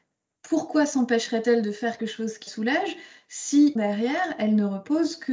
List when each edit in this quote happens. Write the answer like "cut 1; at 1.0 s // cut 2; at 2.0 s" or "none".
cut 1; at 2.0 s // cut 2; at 2.5 s // cut 3; at 3.8 s